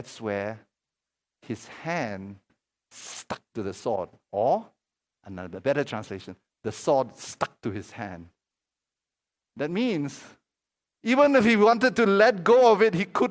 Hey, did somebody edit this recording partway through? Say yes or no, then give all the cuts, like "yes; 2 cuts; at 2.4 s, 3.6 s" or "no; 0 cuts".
no; 0 cuts